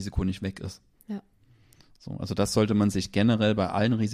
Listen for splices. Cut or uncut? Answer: uncut